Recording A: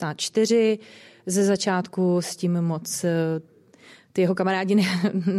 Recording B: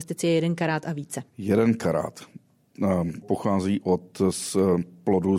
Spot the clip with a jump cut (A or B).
B